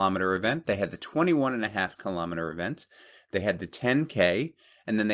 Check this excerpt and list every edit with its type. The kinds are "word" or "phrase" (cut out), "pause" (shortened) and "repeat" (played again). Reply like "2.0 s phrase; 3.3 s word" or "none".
none